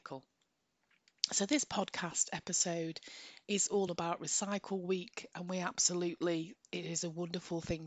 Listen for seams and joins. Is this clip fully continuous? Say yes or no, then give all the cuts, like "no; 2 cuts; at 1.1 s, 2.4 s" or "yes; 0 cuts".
yes; 0 cuts